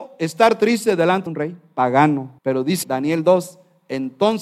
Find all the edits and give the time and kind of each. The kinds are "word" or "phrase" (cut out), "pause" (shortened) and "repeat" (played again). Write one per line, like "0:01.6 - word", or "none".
0:01.3 - word
0:02.4 - pause
0:02.8 - word